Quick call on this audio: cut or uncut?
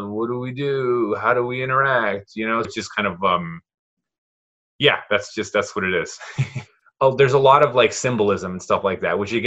cut